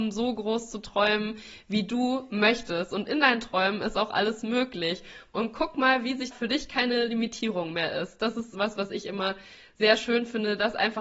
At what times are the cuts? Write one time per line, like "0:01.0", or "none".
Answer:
0:06.3